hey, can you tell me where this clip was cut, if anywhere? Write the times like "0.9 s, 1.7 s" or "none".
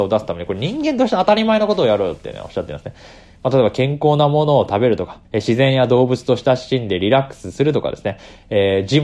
5.2 s